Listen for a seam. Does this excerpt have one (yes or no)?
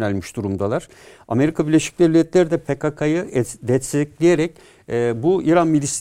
no